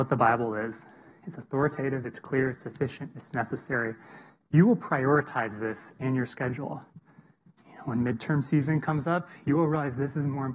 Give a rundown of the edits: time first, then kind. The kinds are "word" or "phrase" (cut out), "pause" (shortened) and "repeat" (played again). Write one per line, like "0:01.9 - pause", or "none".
none